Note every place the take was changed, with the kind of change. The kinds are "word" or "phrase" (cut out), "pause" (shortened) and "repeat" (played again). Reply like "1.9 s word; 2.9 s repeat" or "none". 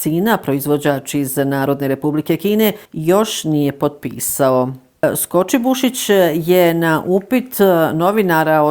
2.9 s pause

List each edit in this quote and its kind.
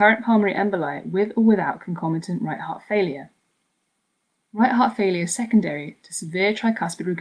none

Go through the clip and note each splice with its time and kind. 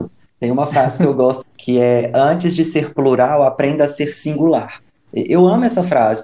1.4 s word

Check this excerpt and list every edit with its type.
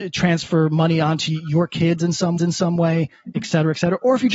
2.4 s repeat

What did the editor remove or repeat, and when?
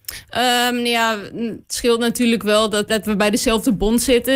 1.6 s pause; 2.9 s word

